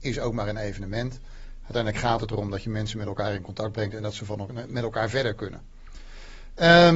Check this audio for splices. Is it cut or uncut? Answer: uncut